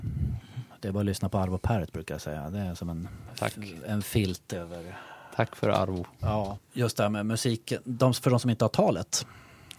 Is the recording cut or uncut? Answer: uncut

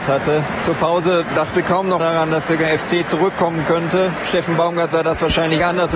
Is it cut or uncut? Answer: cut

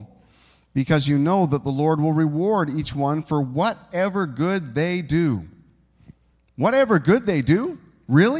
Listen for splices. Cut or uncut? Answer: uncut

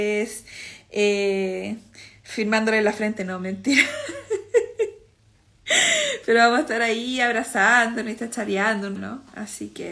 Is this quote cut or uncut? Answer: cut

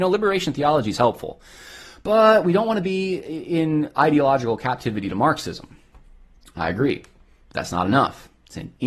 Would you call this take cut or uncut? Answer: uncut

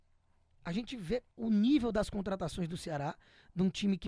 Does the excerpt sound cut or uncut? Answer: cut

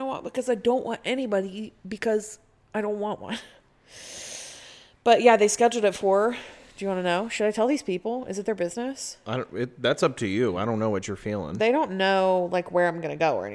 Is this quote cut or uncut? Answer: uncut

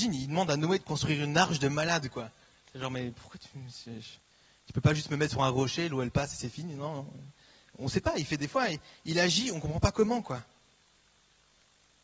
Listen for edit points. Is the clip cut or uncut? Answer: uncut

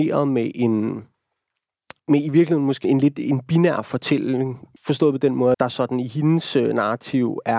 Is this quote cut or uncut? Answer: cut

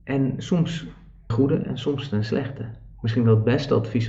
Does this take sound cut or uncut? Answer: cut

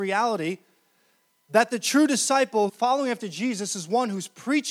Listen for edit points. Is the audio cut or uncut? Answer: cut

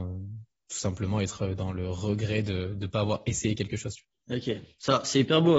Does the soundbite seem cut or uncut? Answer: cut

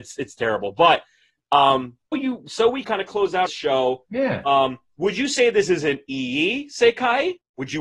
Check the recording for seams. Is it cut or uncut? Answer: cut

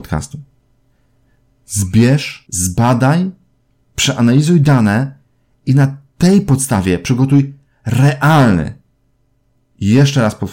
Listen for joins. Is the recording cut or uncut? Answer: cut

